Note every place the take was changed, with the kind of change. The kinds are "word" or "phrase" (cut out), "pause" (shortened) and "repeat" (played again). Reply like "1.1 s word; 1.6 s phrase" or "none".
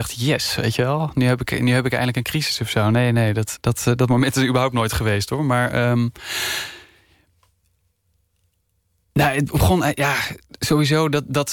3.6 s word